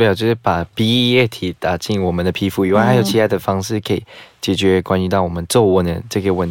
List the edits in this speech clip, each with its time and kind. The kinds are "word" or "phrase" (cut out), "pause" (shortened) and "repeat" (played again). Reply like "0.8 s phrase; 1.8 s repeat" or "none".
none